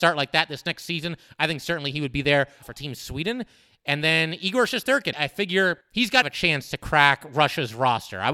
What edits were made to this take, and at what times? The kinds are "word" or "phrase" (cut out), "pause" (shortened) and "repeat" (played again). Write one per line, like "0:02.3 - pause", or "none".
0:02.6 - word
0:05.1 - word
0:05.8 - pause
0:06.2 - phrase